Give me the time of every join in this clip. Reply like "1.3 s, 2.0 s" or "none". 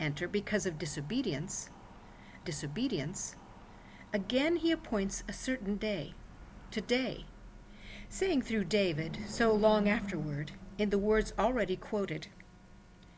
2.4 s